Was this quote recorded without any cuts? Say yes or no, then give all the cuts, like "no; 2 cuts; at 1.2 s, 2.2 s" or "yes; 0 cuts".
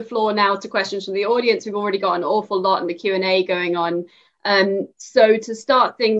yes; 0 cuts